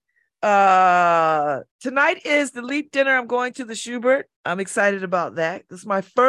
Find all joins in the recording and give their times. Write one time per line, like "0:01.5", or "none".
0:01.7
0:04.3